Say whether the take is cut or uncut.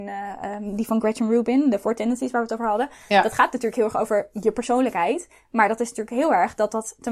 uncut